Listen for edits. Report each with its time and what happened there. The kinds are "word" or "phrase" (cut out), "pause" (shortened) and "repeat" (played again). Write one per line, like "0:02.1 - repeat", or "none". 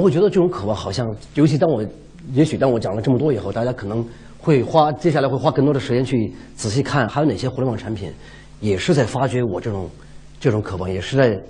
0:07.1 - word

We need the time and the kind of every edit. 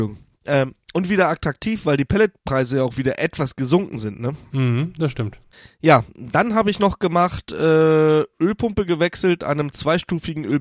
0:05.5 - pause

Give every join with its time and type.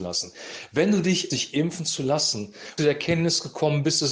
0:01.3 - word
0:02.8 - phrase

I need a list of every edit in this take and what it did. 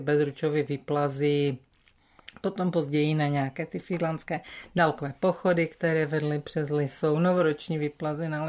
none

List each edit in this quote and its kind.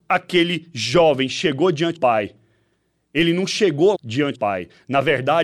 0:01.9 - word
0:03.9 - word
0:04.3 - word

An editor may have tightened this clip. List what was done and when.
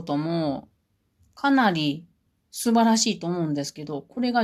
0:02.3 - pause

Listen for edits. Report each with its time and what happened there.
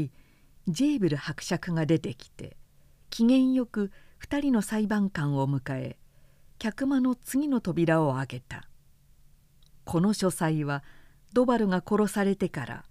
none

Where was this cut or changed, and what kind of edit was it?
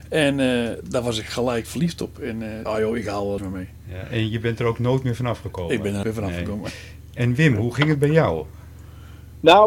0:02.6 - phrase
0:03.4 - phrase
0:06.0 - word

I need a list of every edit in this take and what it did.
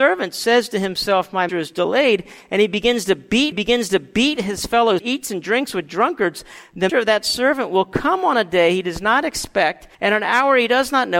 0:01.5 - word
0:03.5 - repeat
0:05.0 - phrase
0:06.9 - word
0:09.9 - pause

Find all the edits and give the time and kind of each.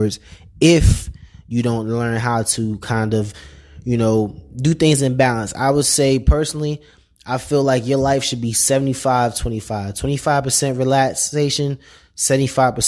none

